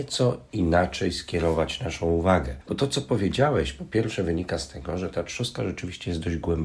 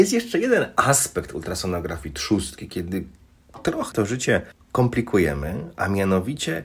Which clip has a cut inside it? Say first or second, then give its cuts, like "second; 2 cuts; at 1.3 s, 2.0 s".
second; 1 cut; at 3.9 s